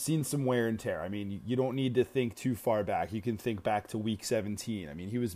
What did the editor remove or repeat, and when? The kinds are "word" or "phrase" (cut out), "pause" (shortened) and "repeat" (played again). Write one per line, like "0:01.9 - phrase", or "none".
none